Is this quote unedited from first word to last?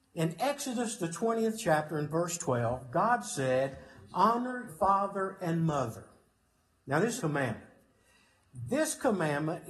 no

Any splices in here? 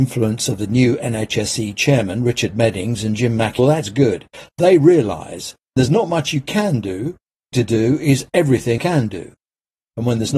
yes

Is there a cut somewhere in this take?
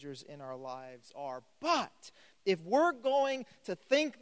no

